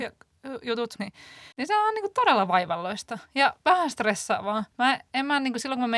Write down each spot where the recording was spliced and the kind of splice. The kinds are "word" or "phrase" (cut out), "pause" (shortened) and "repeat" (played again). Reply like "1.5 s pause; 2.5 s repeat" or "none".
1.0 s word; 1.5 s pause; 3.6 s pause; 4.7 s pause